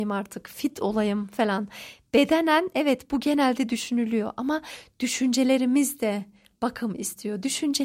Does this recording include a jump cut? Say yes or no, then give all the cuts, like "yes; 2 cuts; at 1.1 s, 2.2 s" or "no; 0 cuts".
no; 0 cuts